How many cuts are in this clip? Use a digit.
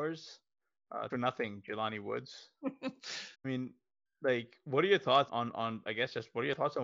3